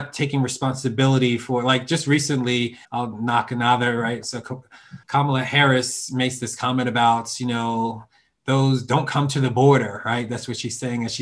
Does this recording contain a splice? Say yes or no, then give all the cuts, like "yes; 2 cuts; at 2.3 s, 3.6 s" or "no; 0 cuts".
yes; 2 cuts; at 2.8 s, 5.0 s